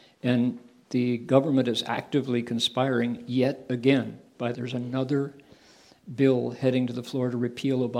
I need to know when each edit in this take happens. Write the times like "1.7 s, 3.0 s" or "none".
4.5 s